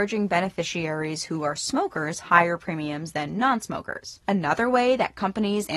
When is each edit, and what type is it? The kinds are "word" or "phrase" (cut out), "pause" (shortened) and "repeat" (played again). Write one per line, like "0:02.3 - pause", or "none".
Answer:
0:04.2 - pause